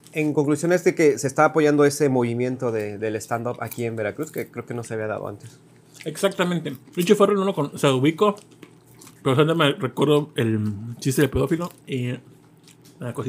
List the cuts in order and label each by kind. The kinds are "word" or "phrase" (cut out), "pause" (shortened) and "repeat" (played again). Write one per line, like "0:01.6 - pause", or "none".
0:06.9 - pause
0:09.2 - pause
0:11.8 - pause

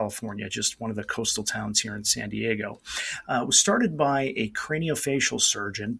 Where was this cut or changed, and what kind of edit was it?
none

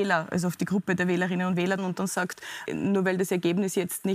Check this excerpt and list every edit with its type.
0:01.8 - phrase
0:02.7 - word

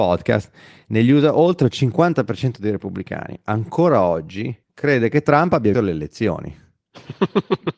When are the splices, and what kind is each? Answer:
0:04.6 - pause
0:05.7 - word

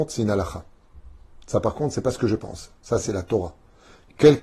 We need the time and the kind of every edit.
none

